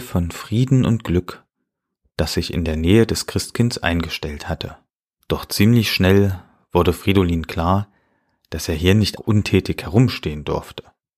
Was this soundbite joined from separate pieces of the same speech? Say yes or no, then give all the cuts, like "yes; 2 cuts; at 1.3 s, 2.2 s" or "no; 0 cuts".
yes; 2 cuts; at 4.9 s, 9.2 s